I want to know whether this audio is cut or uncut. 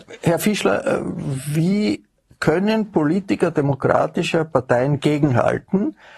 uncut